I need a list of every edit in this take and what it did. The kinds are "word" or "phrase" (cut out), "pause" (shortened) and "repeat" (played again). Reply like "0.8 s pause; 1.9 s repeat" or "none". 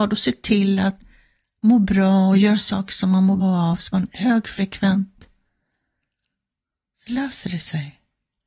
3.4 s word